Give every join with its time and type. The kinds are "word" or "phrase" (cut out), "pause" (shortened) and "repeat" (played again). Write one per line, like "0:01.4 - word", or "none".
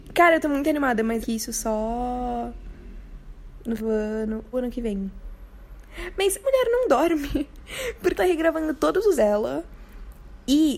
0:01.2 - word
0:03.8 - word
0:04.5 - word
0:06.4 - word
0:08.1 - word
0:09.2 - word